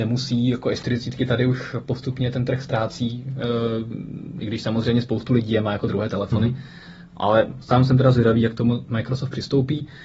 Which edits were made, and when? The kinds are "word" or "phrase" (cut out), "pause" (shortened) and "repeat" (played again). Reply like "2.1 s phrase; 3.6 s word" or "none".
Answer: none